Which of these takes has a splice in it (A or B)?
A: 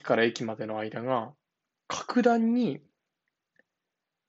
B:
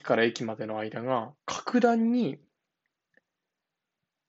B